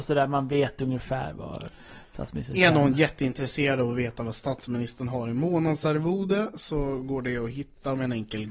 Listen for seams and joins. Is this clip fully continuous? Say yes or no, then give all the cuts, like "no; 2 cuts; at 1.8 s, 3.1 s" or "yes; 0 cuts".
yes; 0 cuts